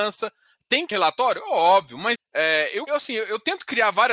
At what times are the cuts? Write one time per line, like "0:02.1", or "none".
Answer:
0:00.9
0:02.2
0:02.9